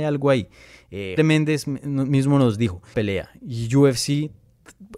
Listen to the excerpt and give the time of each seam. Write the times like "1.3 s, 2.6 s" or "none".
1.2 s, 2.9 s

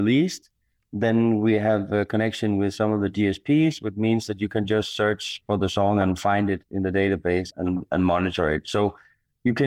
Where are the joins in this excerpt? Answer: 7.5 s

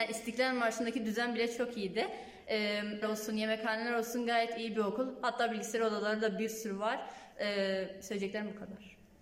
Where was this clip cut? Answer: 3.0 s

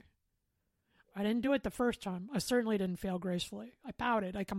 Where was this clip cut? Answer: none

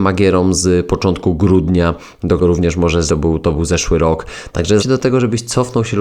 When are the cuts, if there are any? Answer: 2.4 s, 3.1 s, 4.8 s

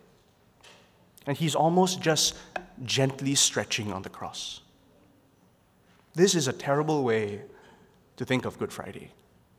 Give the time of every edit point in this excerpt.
none

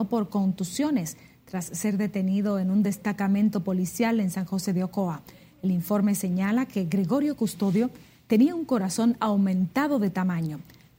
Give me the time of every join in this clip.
none

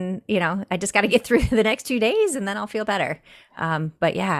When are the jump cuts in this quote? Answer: none

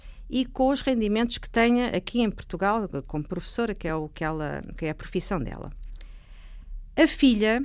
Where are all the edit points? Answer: none

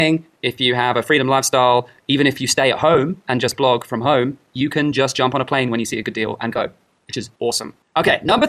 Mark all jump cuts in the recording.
7.3 s

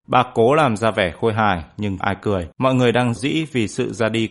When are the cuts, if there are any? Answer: 2.0 s, 2.5 s, 3.2 s

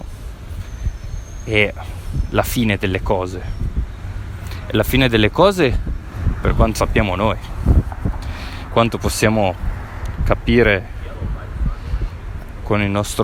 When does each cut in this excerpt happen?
6.7 s, 8.7 s

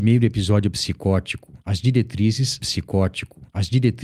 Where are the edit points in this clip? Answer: 2.6 s

